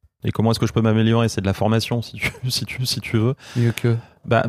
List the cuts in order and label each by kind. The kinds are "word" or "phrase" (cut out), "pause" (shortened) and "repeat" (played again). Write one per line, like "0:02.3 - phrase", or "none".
0:02.8 - repeat